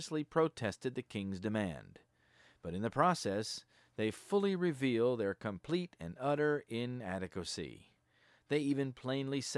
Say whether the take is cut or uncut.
uncut